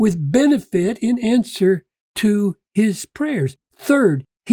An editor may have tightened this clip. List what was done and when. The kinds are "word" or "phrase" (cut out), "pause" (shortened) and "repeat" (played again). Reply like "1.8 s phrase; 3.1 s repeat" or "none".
none